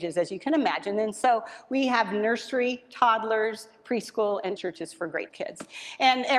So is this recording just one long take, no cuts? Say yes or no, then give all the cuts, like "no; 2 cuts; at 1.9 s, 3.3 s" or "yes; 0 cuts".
no; 2 cuts; at 4.6 s, 5.3 s